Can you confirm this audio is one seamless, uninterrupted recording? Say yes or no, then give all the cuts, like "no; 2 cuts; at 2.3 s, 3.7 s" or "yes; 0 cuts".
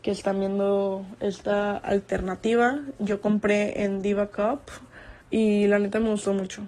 no; 1 cut; at 5.2 s